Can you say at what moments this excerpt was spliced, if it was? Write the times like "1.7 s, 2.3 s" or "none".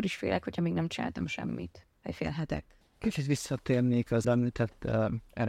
1.9 s, 4.2 s